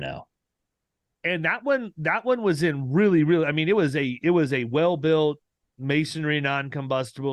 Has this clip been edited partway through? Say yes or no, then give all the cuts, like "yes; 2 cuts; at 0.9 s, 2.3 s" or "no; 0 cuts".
no; 0 cuts